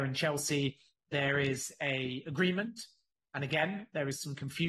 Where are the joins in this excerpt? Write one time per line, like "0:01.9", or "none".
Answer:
none